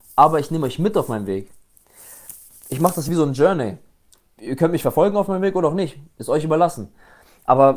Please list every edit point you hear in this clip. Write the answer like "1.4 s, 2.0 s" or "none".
none